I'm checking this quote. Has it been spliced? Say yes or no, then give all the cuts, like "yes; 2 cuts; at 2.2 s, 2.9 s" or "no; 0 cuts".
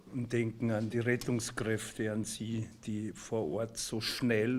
no; 0 cuts